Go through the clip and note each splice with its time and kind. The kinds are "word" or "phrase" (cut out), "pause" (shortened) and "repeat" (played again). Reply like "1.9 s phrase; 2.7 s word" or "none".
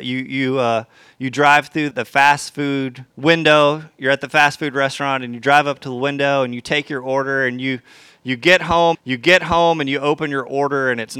1.9 s word; 3.1 s pause; 8.9 s repeat